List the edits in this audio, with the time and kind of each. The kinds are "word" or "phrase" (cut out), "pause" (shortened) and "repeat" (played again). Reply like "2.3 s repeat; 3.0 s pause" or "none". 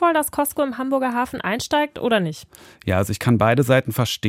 none